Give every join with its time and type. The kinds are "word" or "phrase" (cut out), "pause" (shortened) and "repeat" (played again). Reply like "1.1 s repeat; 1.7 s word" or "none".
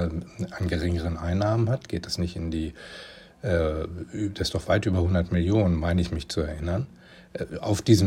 none